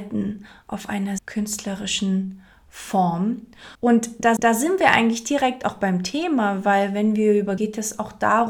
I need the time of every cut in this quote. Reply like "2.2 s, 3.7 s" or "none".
1.2 s, 3.7 s, 4.4 s, 7.6 s